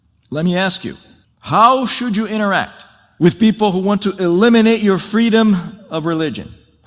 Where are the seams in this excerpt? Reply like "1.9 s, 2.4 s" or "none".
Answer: 1.2 s